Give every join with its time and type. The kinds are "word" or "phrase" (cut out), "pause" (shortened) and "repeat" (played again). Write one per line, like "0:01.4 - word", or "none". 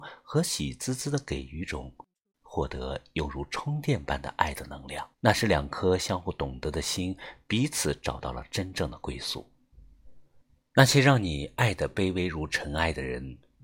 0:05.1 - pause
0:10.4 - pause

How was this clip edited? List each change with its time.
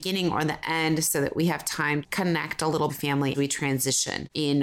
0:02.0 - word
0:02.9 - phrase
0:03.3 - word

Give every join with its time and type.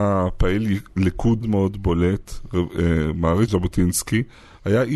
0:01.4 - word
0:03.5 - word

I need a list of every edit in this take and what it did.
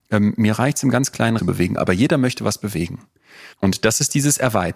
0:01.4 - phrase
0:03.5 - pause

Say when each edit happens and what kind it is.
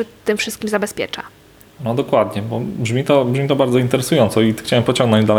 none

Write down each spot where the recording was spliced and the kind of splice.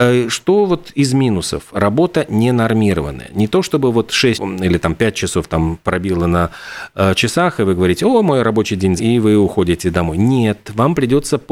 0:04.3 - word
0:09.0 - word

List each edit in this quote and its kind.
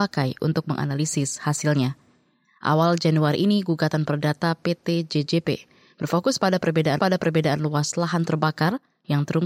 0:07.0 - repeat

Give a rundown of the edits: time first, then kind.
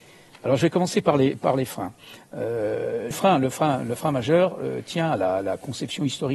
0:03.1 - word

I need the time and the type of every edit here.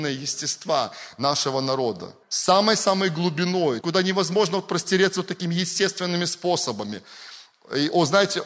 0:02.2 - pause
0:03.8 - phrase

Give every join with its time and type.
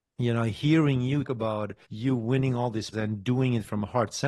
0:01.2 - word
0:01.8 - pause
0:02.9 - word

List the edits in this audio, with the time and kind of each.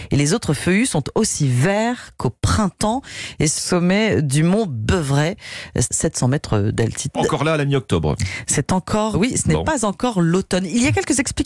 0:03.6 - word
0:05.9 - word
0:07.1 - word
0:09.1 - word

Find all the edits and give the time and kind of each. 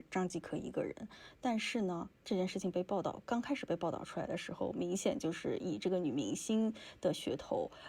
0:02.2 - pause

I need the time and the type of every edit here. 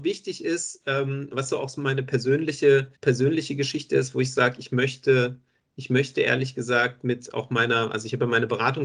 0:03.0 - pause

